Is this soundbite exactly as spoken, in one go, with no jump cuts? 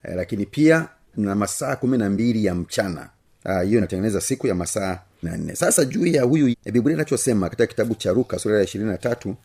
no; 4 cuts; at 1.1 s, 3.8 s, 5.2 s, 6.5 s

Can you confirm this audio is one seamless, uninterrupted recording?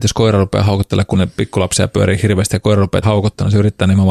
no; 2 cuts; at 1.1 s, 3.0 s

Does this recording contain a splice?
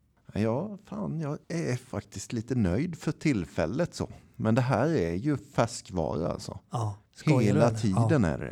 yes; 2 cuts; at 1.4 s, 7.1 s

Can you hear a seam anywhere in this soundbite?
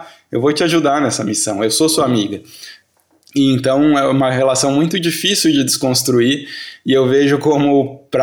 no; 0 cuts

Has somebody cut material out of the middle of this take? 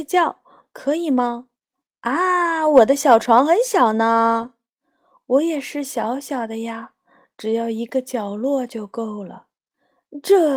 yes; 1 cut; at 1.6 s

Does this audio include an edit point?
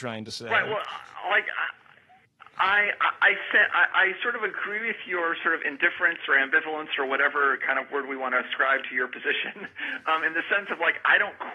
no; 0 cuts

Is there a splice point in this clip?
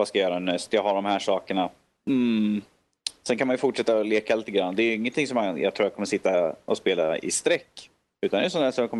no; 0 cuts

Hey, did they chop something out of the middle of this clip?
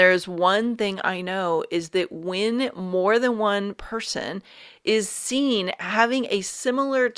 no; 0 cuts

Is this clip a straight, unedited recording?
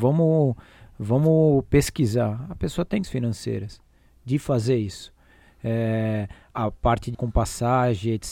no; 3 cuts; at 3.0 s, 6.5 s, 7.1 s

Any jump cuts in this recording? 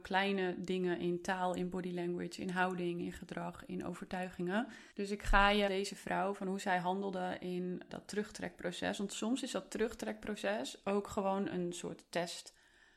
yes; 3 cuts; at 4.9 s, 5.7 s, 7.9 s

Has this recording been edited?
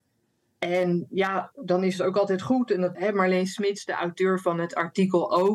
yes; 1 cut; at 2.9 s

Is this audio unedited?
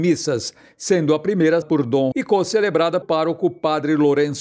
no; 3 cuts; at 1.6 s, 2.1 s, 3.0 s

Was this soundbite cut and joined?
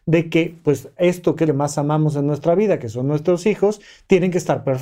yes; 1 cut; at 1.5 s

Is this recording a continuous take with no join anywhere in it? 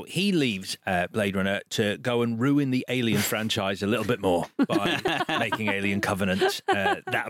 yes; 0 cuts

